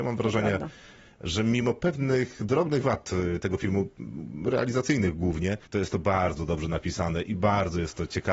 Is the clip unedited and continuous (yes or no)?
no